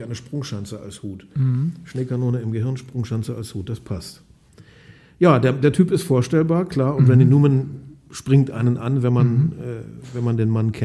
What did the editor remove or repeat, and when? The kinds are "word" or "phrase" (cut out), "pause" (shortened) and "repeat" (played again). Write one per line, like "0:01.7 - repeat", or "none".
none